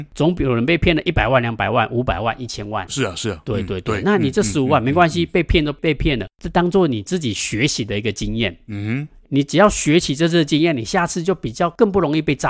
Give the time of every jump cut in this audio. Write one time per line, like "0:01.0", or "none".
0:06.3
0:09.2